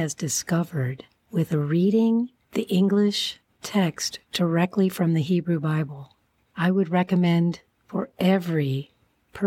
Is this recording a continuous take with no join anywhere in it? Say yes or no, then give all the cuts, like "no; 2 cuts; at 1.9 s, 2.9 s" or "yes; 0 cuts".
yes; 0 cuts